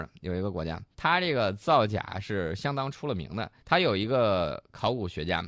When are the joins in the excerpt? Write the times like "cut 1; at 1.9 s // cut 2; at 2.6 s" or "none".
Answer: cut 1; at 0.9 s // cut 2; at 3.6 s